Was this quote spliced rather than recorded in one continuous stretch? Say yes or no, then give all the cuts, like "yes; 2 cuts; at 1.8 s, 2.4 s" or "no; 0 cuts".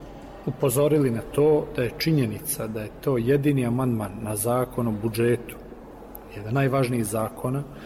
yes; 1 cut; at 6.5 s